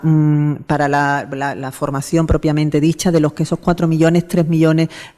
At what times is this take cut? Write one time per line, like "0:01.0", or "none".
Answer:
none